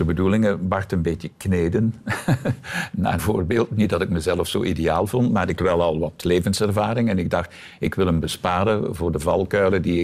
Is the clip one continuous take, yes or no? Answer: no